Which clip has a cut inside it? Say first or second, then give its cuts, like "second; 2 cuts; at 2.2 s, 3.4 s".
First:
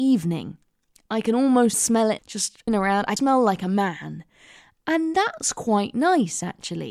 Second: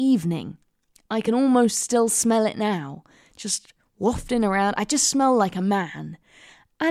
first; 4 cuts; at 1.7 s, 2.2 s, 2.7 s, 3.2 s